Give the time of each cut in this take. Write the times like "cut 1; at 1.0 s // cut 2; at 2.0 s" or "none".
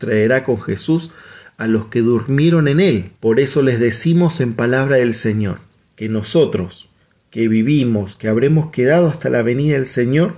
cut 1; at 3.1 s // cut 2; at 5.8 s